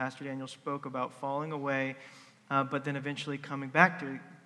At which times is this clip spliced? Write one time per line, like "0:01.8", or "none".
none